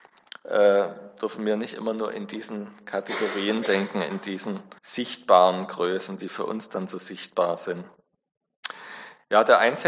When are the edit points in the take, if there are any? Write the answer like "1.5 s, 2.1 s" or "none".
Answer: 4.8 s